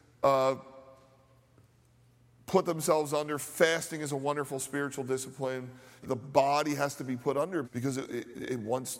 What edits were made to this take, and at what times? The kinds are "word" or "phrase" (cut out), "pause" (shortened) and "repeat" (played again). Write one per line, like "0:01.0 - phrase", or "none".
0:06.0 - phrase
0:07.6 - word